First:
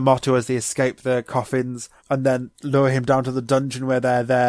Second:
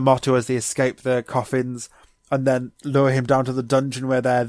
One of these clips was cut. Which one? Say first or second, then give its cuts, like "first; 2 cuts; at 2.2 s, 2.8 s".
first; 1 cut; at 2.0 s